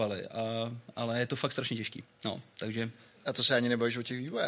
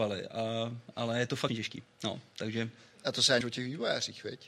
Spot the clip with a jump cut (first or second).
second